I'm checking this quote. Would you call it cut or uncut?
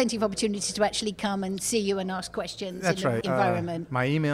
cut